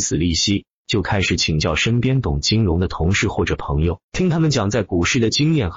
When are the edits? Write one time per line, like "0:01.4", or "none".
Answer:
0:04.0